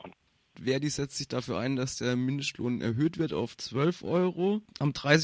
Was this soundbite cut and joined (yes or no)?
no